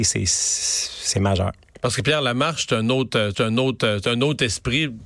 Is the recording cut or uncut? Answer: cut